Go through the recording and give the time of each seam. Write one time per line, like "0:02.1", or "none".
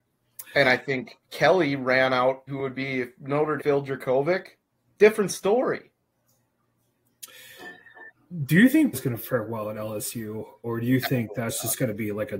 0:01.2
0:02.5
0:03.6
0:04.7
0:08.9